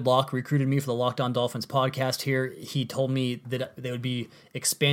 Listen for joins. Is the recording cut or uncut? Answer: uncut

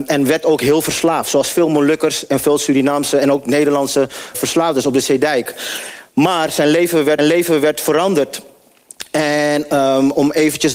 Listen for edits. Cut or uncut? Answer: cut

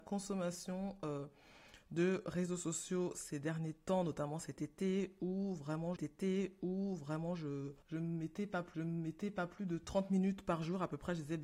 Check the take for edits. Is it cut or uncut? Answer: cut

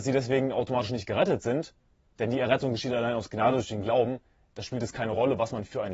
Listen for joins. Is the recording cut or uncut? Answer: uncut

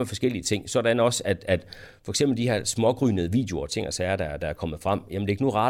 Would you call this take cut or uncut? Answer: uncut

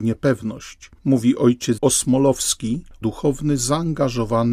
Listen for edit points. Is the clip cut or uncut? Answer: cut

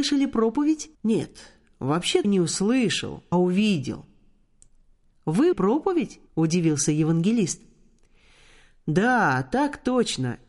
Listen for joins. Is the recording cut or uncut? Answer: cut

